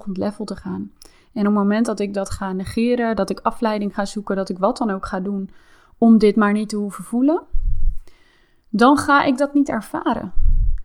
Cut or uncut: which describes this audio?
uncut